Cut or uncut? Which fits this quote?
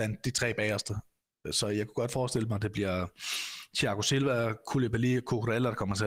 uncut